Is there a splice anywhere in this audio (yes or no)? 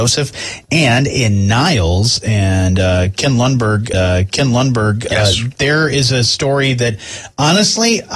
yes